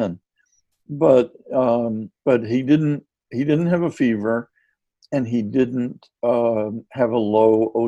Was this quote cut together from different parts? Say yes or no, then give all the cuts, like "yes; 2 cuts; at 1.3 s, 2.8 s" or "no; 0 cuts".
no; 0 cuts